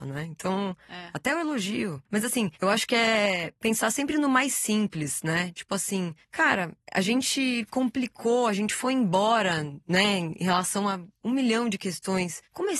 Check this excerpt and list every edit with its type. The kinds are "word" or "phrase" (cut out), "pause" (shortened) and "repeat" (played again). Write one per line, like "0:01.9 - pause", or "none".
none